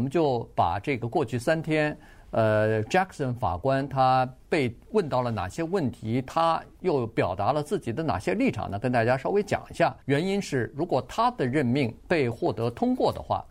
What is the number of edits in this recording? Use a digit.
2